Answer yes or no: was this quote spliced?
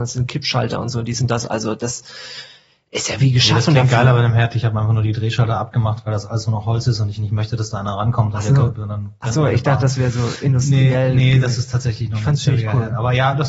no